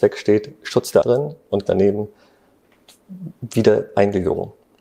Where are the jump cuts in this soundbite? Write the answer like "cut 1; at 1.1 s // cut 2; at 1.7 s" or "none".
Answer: cut 1; at 1.0 s // cut 2; at 1.7 s